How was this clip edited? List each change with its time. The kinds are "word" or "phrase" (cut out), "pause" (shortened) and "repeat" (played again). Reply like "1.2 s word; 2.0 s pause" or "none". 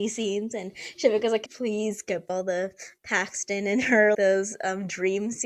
1.5 s word; 2.3 s word; 4.1 s word